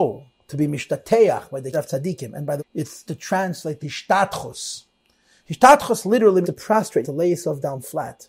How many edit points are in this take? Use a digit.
6